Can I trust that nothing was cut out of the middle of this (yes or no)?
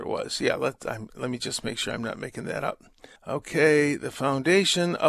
no